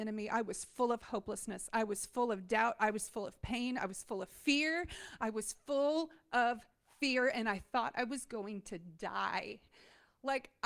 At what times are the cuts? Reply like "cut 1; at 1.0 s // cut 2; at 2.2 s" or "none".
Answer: none